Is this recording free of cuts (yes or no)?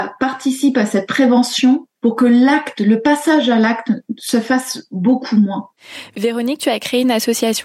no